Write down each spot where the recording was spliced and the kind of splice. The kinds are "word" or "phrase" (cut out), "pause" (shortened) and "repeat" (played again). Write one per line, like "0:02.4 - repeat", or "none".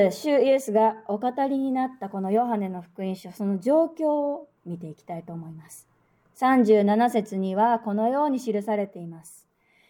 0:04.6 - pause